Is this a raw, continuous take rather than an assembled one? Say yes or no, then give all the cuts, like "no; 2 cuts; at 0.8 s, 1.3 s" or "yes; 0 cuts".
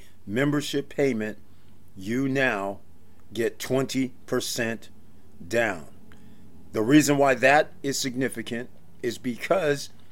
yes; 0 cuts